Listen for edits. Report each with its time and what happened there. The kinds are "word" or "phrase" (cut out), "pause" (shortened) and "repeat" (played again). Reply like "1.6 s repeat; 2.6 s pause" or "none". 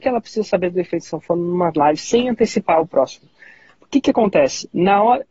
none